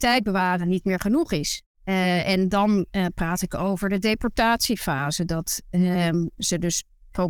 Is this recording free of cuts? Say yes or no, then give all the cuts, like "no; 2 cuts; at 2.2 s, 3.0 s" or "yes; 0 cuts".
no; 1 cut; at 1.7 s